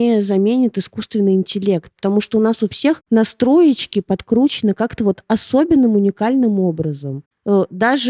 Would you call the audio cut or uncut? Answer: uncut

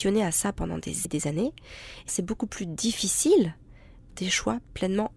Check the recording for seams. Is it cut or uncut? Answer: cut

